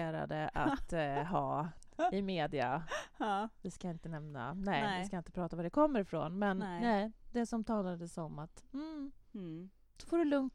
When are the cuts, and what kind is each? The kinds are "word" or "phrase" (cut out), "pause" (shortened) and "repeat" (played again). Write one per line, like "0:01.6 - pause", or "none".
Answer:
none